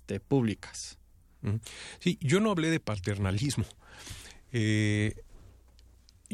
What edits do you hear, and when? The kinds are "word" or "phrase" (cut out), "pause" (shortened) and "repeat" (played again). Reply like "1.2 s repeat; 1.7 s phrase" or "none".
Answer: none